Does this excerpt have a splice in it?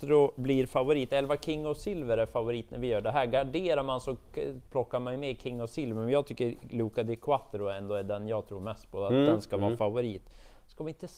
no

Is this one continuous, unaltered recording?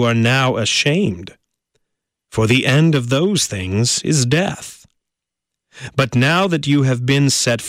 yes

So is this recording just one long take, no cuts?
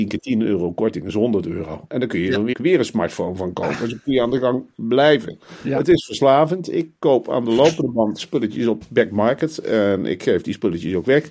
no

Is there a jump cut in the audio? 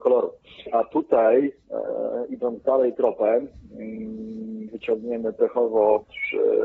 yes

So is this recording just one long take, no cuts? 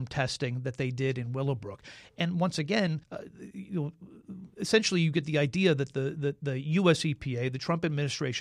no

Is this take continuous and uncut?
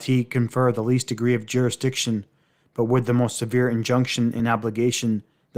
yes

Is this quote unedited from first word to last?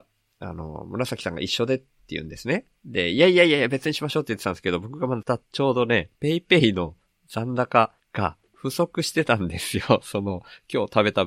no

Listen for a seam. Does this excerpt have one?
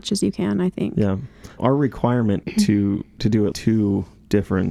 yes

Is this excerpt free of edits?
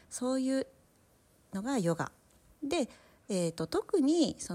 yes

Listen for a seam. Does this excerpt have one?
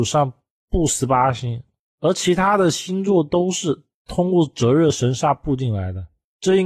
no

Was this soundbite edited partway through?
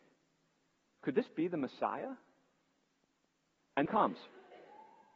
yes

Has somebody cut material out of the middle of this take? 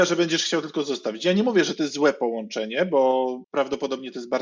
no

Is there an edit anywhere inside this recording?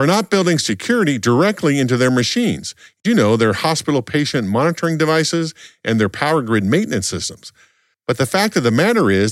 no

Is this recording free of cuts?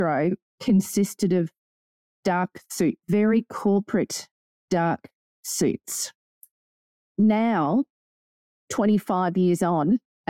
yes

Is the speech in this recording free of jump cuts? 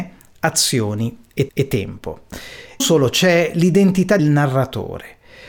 no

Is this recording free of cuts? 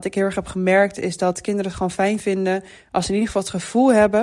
yes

